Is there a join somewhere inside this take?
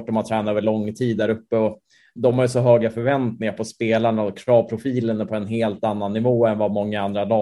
yes; 1 cut; at 2.2 s

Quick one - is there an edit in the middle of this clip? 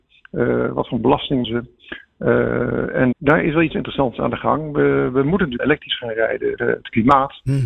yes; 5 cuts; at 1.4 s, 3.1 s, 3.7 s, 5.6 s, 6.6 s

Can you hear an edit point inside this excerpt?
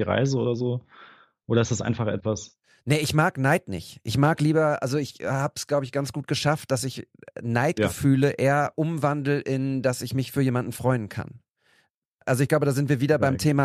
no; 0 cuts

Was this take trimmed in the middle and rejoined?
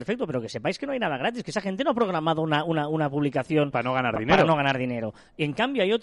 no; 0 cuts

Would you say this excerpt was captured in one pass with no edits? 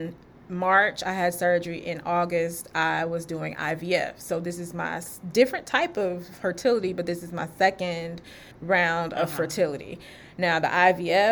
no; 1 cut; at 8.5 s

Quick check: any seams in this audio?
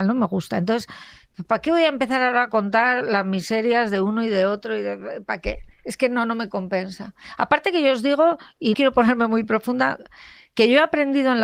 yes; 2 cuts; at 1.5 s, 8.7 s

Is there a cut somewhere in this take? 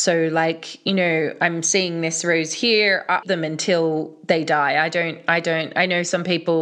yes; 1 cut; at 3.2 s

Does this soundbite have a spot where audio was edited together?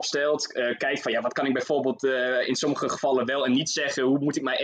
no; 0 cuts

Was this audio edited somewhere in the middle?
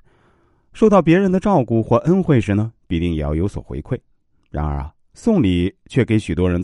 no; 0 cuts

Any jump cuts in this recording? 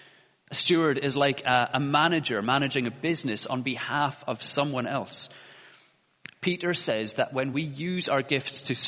no; 0 cuts

